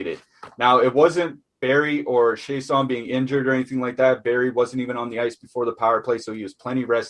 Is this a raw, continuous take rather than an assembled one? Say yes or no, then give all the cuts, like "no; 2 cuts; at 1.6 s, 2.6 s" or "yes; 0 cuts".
yes; 0 cuts